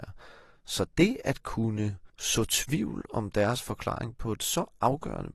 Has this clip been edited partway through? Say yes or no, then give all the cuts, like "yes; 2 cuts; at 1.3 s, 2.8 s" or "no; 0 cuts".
yes; 1 cut; at 2.1 s